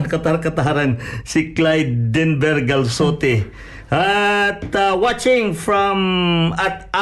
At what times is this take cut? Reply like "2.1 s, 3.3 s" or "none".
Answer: none